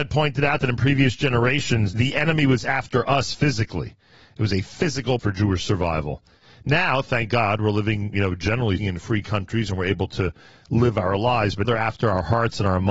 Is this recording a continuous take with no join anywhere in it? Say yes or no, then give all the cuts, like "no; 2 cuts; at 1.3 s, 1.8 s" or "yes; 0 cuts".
no; 4 cuts; at 1.9 s, 5.2 s, 8.8 s, 11.6 s